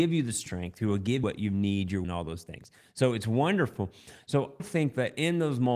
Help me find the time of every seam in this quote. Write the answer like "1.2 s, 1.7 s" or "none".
1.2 s, 2.0 s, 4.6 s